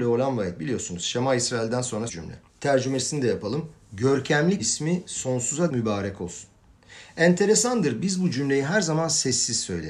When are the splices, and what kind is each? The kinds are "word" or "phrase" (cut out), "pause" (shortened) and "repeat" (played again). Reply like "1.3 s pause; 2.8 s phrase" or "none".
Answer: 2.1 s word; 2.5 s pause; 4.6 s word; 5.7 s word